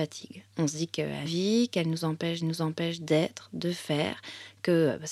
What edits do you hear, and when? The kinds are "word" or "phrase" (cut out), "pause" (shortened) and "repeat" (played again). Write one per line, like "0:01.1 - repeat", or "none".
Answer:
0:01.2 - phrase
0:02.4 - repeat